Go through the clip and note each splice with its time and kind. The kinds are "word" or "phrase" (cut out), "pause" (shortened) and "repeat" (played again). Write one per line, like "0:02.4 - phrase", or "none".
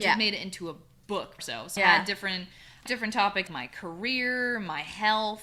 0:01.4 - word
0:01.8 - word
0:02.9 - word
0:03.5 - word